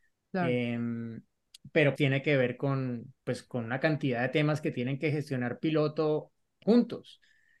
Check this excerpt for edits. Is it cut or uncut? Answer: cut